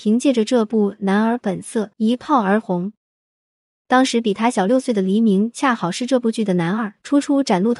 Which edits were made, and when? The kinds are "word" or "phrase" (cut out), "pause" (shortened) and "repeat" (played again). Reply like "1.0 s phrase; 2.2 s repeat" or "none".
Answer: 1.9 s pause